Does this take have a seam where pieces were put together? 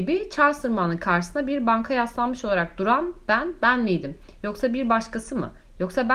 no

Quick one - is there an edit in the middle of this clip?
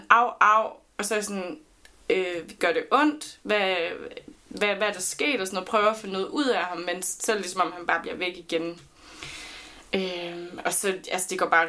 no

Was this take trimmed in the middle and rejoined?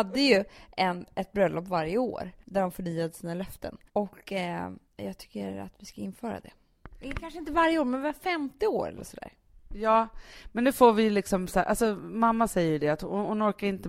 yes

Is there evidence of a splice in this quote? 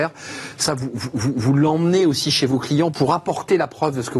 no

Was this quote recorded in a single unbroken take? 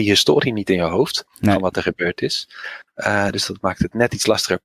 yes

